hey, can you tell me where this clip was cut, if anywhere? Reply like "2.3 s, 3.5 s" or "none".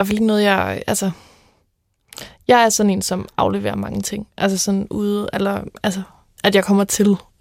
none